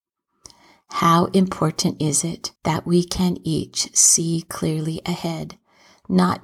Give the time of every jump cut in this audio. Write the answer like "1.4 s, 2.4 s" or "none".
2.6 s